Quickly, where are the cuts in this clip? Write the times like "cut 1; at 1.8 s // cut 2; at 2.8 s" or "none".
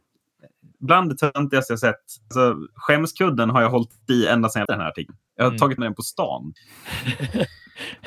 cut 1; at 4.7 s // cut 2; at 5.3 s // cut 3; at 5.8 s

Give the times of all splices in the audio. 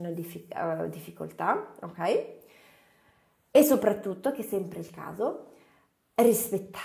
none

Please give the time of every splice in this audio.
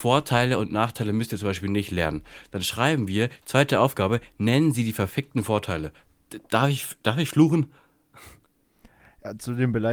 none

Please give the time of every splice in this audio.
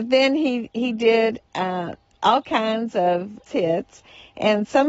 cut 1; at 3.5 s

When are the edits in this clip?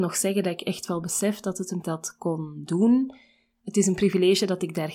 cut 1; at 1.8 s

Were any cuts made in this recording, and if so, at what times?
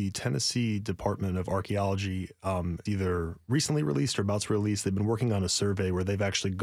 cut 1; at 2.9 s

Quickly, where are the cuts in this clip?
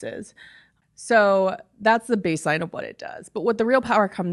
none

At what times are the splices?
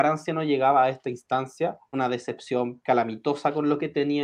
cut 1; at 1.9 s // cut 2; at 2.8 s

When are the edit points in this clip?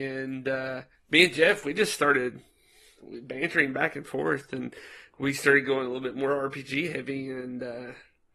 cut 1; at 0.9 s

